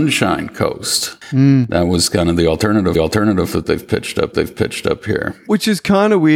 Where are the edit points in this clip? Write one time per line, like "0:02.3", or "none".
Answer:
0:02.9
0:04.3